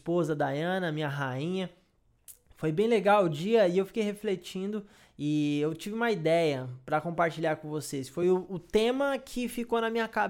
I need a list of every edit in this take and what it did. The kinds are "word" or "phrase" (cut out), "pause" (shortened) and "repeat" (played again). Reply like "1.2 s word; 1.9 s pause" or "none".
none